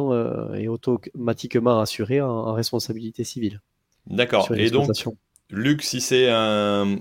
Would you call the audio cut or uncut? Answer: uncut